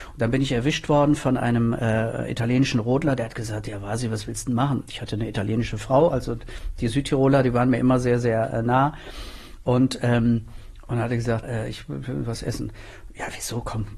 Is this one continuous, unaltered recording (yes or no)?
no